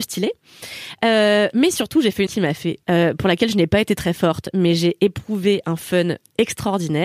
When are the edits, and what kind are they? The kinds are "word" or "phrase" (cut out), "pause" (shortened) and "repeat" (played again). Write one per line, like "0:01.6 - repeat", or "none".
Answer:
0:02.3 - word
0:02.8 - phrase

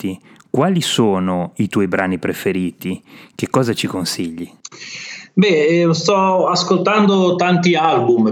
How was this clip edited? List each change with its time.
none

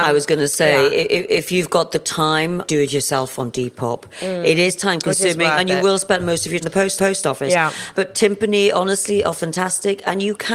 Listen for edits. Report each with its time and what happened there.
0:02.7 - phrase
0:06.6 - word
0:07.0 - repeat
0:07.9 - word

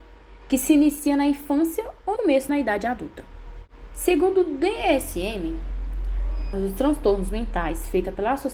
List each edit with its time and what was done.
0:02.2 - word
0:02.5 - phrase
0:06.5 - word

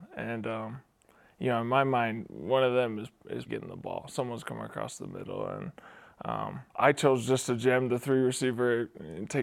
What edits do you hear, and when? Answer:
0:03.5 - word
0:06.7 - pause

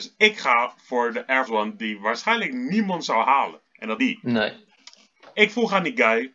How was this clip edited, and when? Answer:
0:01.5 - word
0:03.7 - pause
0:04.0 - word

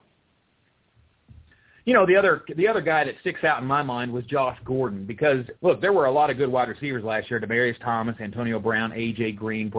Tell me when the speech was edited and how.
0:05.6 - pause

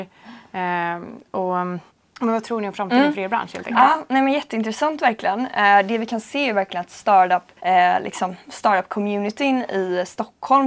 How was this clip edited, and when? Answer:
0:01.9 - pause
0:07.6 - pause

